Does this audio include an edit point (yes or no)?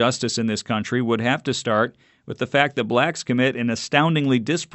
no